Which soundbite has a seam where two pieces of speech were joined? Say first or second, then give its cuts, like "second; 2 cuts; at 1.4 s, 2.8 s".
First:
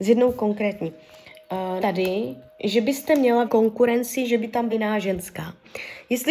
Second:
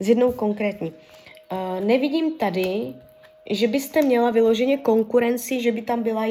first; 4 cuts; at 1.8 s, 2.5 s, 3.5 s, 4.7 s